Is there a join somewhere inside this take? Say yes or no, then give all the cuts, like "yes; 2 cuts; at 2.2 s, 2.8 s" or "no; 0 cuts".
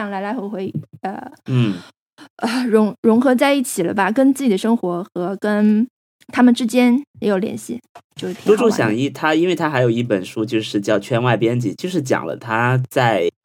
no; 0 cuts